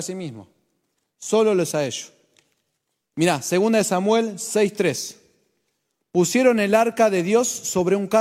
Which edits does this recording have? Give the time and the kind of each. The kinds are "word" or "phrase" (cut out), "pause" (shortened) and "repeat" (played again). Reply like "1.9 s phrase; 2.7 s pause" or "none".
1.7 s word